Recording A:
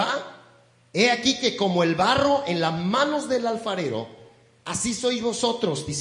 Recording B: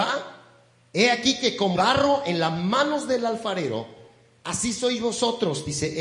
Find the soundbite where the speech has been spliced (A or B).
B